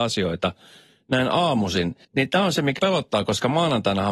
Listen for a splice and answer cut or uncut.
cut